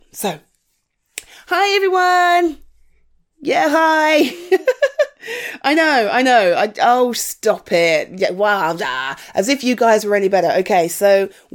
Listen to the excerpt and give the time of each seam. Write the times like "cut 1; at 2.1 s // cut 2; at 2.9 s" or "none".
none